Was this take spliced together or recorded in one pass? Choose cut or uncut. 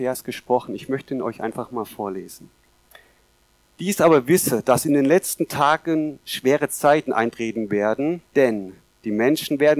cut